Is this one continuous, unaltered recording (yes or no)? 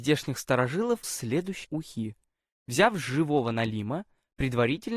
no